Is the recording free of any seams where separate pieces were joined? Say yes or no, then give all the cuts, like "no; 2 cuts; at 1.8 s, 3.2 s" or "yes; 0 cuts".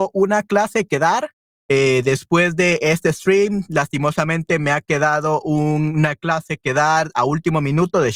yes; 0 cuts